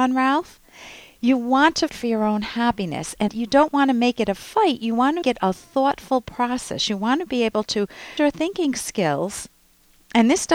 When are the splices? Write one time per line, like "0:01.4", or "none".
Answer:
0:01.9
0:03.3
0:05.2
0:08.2

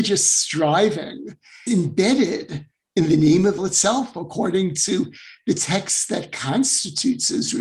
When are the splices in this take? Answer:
0:01.7
0:03.6

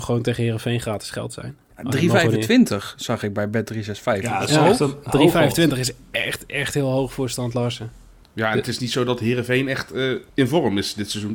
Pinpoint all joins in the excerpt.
0:08.2
0:10.3

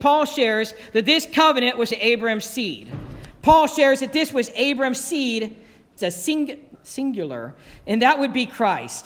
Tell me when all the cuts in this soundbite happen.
0:01.9
0:06.0
0:06.7

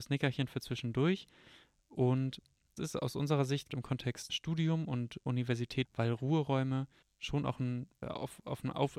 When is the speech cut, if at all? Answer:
0:02.8
0:03.7
0:04.3
0:05.3
0:05.8
0:07.0
0:08.0

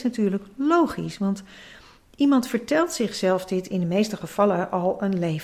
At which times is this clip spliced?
none

